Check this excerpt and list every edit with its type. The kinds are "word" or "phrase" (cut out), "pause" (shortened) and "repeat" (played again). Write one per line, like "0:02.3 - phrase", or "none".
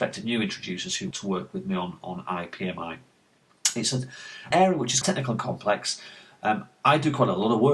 0:01.1 - word
0:04.5 - word
0:05.0 - word